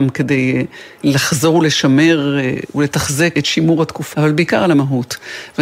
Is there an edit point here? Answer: yes; 3 cuts; at 1.0 s, 3.3 s, 4.1 s

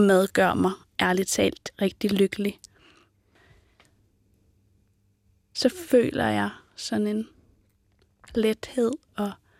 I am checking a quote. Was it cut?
no; 0 cuts

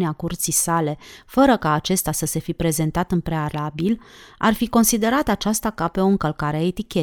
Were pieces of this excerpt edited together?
no; 0 cuts

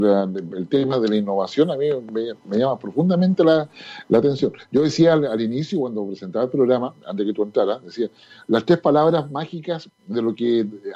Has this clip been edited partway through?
no; 0 cuts

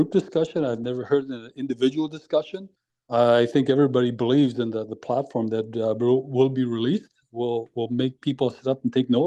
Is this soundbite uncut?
no; 1 cut; at 2.8 s

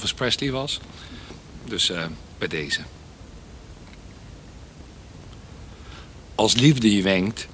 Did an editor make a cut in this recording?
no; 0 cuts

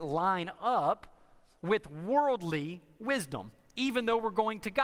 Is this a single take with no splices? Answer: yes; 0 cuts

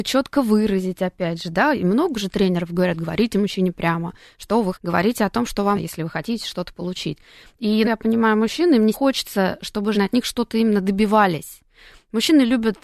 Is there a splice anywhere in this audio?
yes; 5 cuts; at 4.7 s, 5.8 s, 7.8 s, 8.9 s, 9.9 s

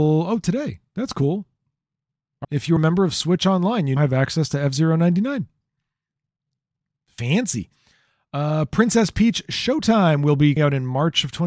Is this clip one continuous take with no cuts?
no; 4 cuts; at 2.4 s, 2.8 s, 4.0 s, 10.6 s

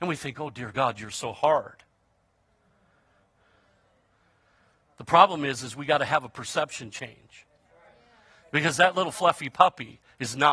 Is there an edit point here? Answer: no; 0 cuts

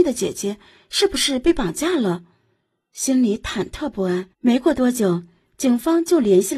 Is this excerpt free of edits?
no; 1 cut; at 4.3 s

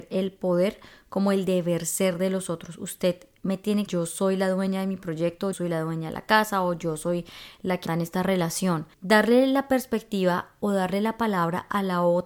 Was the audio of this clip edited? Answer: yes; 4 cuts; at 3.9 s, 5.5 s, 7.9 s, 8.9 s

